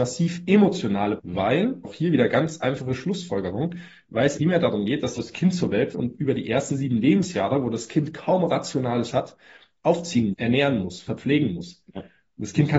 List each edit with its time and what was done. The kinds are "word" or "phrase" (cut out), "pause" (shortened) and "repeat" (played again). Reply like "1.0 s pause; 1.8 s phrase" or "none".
1.2 s word; 1.8 s word; 4.4 s word; 5.2 s word; 5.9 s word; 9.1 s word; 10.3 s word